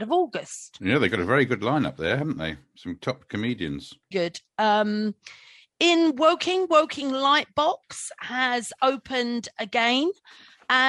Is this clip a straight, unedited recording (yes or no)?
no